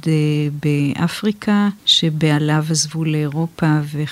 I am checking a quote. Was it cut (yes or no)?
yes